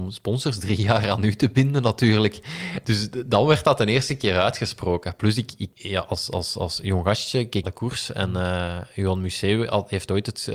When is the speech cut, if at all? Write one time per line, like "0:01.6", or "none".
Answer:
0:07.6